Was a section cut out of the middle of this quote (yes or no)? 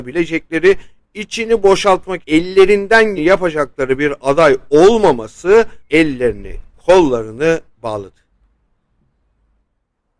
yes